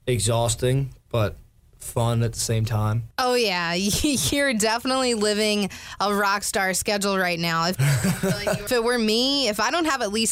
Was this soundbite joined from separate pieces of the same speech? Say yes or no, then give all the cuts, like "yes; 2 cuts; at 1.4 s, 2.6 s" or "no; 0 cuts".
no; 0 cuts